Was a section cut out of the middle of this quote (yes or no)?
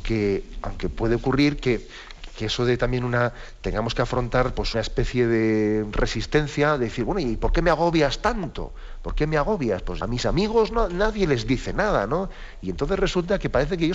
yes